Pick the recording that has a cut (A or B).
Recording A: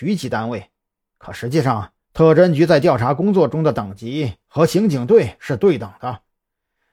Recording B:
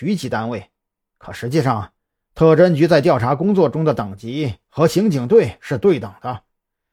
A